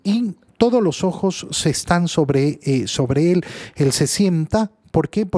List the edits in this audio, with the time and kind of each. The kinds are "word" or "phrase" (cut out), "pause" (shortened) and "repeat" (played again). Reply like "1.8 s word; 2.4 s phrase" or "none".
none